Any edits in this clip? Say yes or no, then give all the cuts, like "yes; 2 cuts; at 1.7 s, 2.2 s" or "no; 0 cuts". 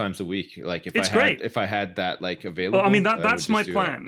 no; 0 cuts